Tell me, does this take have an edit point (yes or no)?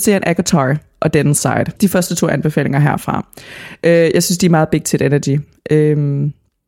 yes